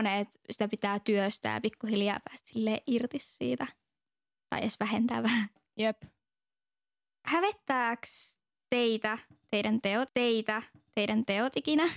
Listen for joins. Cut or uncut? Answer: cut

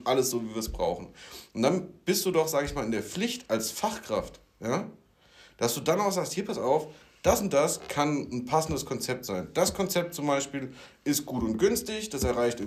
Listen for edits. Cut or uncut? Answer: uncut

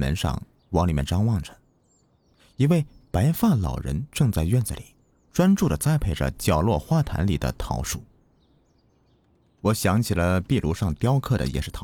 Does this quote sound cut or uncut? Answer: uncut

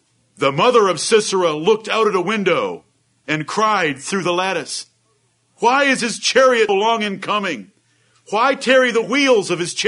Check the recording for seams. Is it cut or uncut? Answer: cut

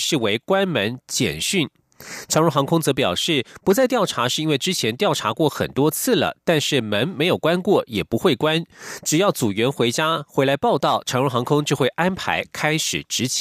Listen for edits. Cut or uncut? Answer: uncut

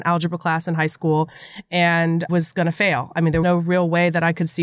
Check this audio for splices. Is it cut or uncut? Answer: cut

